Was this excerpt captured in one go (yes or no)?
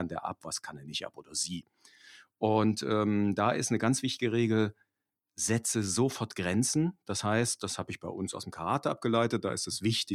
yes